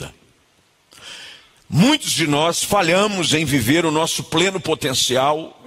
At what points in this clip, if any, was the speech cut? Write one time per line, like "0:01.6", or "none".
none